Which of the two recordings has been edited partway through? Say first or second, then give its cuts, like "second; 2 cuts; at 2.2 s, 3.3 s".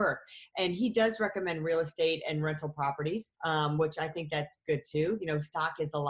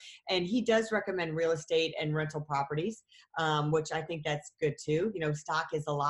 first; 1 cut; at 3.3 s